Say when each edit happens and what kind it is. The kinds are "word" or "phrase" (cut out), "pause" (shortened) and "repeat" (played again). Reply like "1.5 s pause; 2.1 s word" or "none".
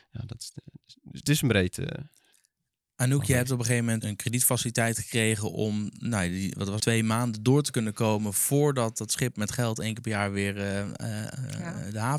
1.2 s word; 4.0 s word; 6.8 s word